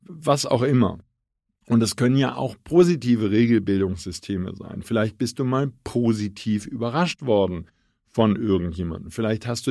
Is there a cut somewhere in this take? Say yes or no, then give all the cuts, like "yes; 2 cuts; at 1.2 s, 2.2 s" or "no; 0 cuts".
no; 0 cuts